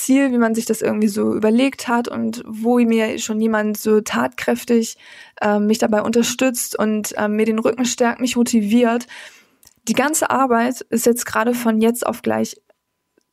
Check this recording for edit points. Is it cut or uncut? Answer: uncut